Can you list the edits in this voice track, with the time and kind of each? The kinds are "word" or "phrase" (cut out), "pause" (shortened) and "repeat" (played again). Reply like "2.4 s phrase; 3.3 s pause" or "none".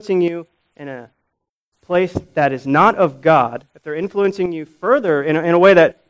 none